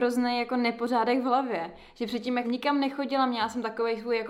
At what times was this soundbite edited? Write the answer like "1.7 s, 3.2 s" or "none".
2.4 s

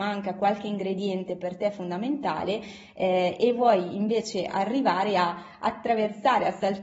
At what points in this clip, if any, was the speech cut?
none

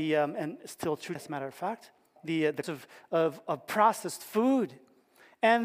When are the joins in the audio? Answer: 1.1 s, 2.2 s, 2.6 s

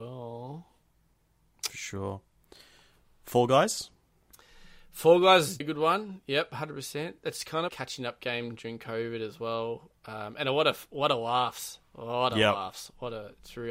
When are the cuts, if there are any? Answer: 5.6 s, 7.7 s

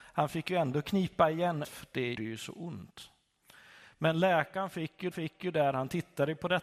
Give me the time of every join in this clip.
1.6 s, 2.2 s, 5.1 s

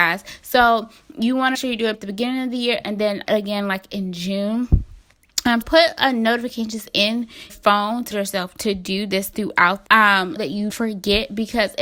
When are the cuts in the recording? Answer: 1.5 s, 1.9 s, 3.2 s, 5.6 s, 7.5 s, 8.1 s, 9.9 s, 10.4 s, 10.7 s

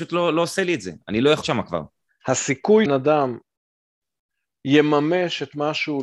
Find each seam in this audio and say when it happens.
1.4 s, 2.9 s

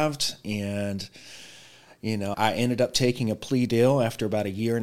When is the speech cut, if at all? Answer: 2.3 s

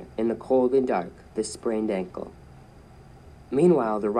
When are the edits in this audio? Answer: 1.4 s

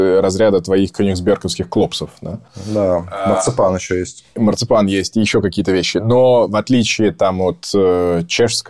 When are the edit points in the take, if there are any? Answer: none

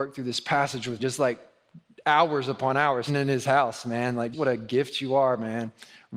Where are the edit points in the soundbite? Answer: 1.0 s, 3.1 s, 4.3 s

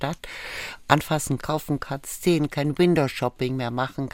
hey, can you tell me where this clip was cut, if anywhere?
1.4 s, 2.5 s

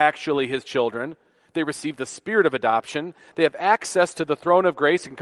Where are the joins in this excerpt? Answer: none

